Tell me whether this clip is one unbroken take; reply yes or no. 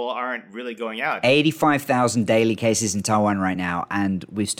yes